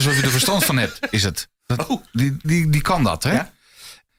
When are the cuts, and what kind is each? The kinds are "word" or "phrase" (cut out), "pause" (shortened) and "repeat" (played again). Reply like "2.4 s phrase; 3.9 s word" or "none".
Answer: 2.4 s word